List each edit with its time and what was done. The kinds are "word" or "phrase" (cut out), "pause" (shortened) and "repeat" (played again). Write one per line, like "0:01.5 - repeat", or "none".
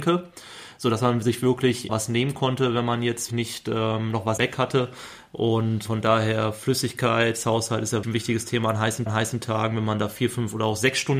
0:01.9 - word
0:03.3 - word
0:04.4 - word
0:05.9 - word
0:08.0 - word
0:09.1 - repeat